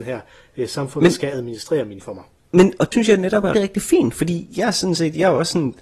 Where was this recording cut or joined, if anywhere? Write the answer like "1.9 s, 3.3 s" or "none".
2.0 s, 2.4 s, 2.9 s, 3.5 s